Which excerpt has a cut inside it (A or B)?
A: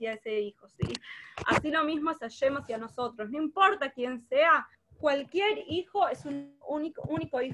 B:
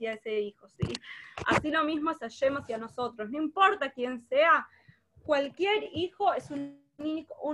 A